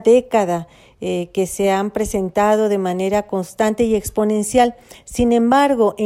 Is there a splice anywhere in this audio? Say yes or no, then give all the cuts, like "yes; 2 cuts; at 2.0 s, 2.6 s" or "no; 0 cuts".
no; 0 cuts